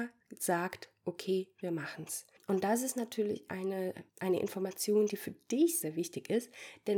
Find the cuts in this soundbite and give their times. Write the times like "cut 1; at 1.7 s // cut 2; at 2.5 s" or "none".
cut 1; at 4.1 s // cut 2; at 5.8 s